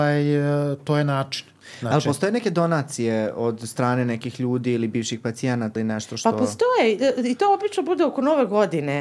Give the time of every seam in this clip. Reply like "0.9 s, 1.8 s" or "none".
5.8 s